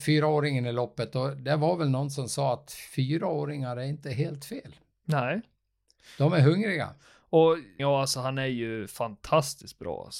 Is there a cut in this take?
yes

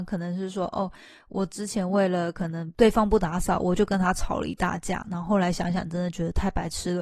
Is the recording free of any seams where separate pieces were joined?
yes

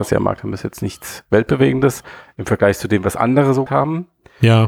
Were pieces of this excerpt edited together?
yes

